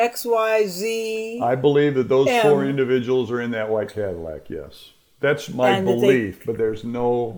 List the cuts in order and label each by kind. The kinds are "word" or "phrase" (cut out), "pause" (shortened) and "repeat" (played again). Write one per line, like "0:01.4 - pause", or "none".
none